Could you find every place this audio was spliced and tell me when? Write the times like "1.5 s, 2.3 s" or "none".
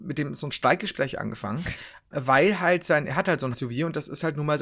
2.1 s, 3.5 s